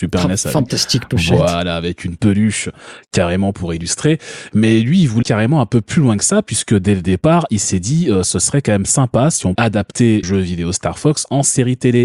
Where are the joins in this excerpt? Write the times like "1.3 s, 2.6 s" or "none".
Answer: 5.2 s, 9.6 s, 10.2 s